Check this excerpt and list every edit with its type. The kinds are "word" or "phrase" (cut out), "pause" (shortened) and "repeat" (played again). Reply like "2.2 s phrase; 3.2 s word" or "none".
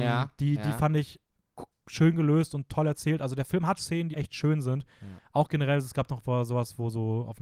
3.8 s word; 4.1 s word

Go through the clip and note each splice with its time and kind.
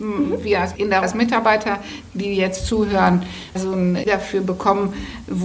1.0 s word; 3.6 s word; 4.1 s word

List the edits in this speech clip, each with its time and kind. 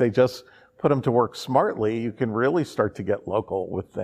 none

